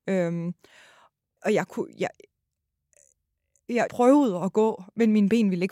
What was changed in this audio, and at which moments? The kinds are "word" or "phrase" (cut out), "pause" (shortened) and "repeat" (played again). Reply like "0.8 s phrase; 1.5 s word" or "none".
1.4 s word; 3.9 s word